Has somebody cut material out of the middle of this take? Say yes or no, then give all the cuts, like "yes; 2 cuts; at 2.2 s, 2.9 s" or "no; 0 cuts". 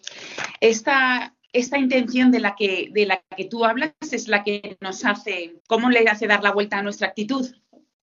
yes; 2 cuts; at 1.4 s, 5.6 s